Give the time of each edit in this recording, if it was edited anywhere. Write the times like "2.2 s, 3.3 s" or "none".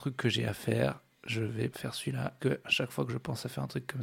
1.7 s, 2.4 s